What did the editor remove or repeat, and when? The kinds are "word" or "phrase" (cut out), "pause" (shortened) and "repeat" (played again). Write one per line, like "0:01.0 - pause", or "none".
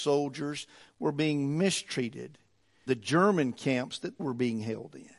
0:02.9 - word
0:04.2 - word